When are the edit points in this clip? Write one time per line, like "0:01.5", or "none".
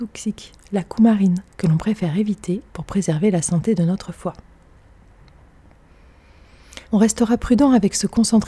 0:01.5
0:06.8